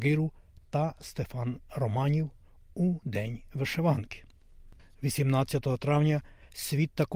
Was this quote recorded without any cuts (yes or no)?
yes